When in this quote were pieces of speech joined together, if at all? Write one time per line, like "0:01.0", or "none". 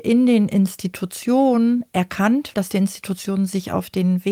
0:02.5